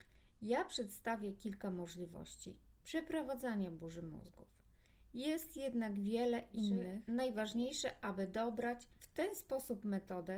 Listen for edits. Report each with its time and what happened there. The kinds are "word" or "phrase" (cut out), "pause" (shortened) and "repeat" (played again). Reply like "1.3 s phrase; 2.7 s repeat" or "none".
none

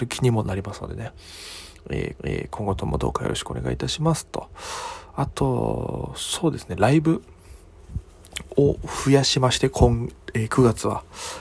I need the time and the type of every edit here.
2.2 s repeat

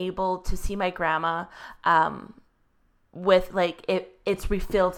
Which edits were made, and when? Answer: none

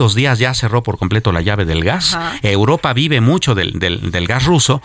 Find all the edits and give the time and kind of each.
none

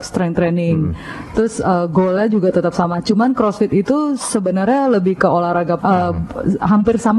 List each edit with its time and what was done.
5.8 s word

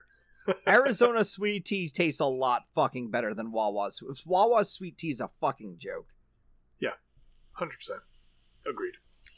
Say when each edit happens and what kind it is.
none

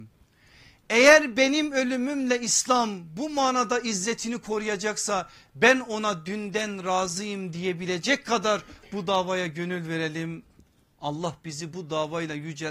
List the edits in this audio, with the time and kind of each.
none

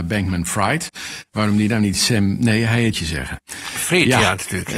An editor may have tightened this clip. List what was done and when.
2.9 s phrase

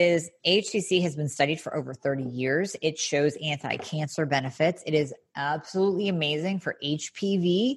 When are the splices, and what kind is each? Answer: none

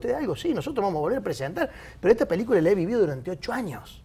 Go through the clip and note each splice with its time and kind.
none

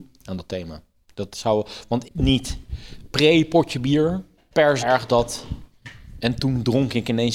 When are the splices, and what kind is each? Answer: 2.0 s phrase; 4.4 s pause; 4.8 s word

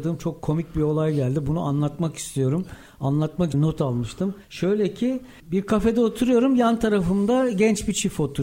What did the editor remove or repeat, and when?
3.5 s phrase; 4.4 s pause

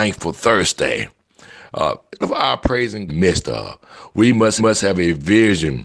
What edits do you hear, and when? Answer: 2.2 s word; 3.1 s phrase; 4.6 s repeat

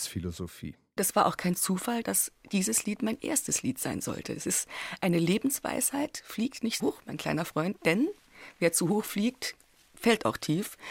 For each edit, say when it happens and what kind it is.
6.8 s word

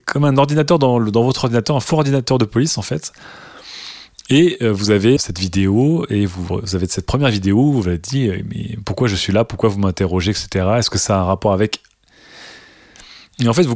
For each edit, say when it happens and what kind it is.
5.2 s word

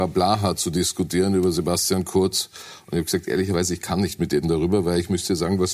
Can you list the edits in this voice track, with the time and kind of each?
4.4 s word

